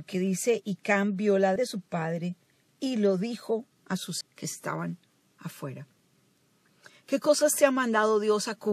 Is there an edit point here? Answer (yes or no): yes